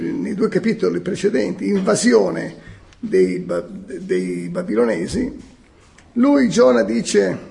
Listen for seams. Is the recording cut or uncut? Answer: uncut